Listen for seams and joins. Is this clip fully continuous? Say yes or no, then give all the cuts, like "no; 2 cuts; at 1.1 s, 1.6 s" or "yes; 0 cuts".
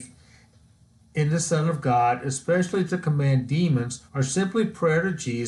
no; 1 cut; at 4.1 s